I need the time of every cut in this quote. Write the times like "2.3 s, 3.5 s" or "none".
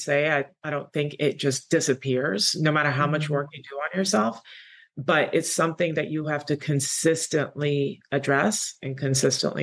none